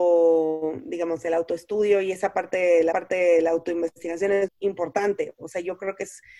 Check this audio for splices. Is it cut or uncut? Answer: cut